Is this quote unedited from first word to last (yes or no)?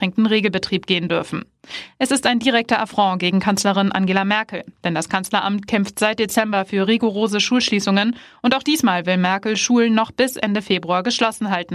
yes